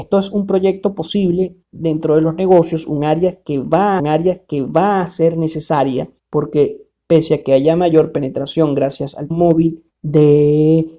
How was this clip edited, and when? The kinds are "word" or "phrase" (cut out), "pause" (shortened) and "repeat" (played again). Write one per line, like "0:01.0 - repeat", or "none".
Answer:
0:01.6 - pause
0:04.0 - repeat
0:06.2 - pause
0:09.3 - word
0:09.9 - pause